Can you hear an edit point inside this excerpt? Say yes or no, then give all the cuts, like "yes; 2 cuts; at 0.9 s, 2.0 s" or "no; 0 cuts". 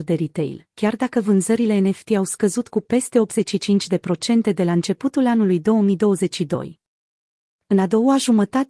no; 0 cuts